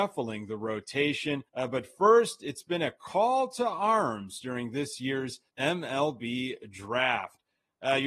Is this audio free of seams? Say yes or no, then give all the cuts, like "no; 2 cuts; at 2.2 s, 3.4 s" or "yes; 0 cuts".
no; 2 cuts; at 1.5 s, 5.5 s